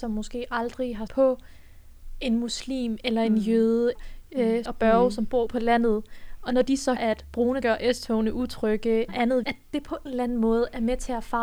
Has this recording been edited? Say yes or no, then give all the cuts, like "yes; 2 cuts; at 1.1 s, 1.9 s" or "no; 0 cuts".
yes; 9 cuts; at 1.1 s, 4.0 s, 4.7 s, 5.5 s, 7.0 s, 7.6 s, 9.1 s, 9.4 s, 10.1 s